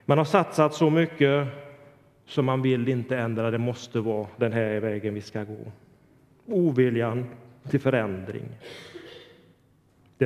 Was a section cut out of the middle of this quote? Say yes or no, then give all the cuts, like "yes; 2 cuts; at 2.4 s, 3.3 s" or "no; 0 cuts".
no; 0 cuts